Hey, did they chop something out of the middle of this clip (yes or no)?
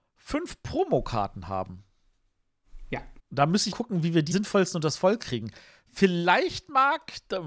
yes